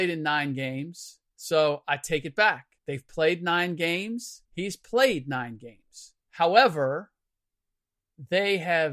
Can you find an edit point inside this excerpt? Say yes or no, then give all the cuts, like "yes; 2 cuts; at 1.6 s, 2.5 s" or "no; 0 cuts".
yes; 3 cuts; at 2.8 s, 4.4 s, 6.2 s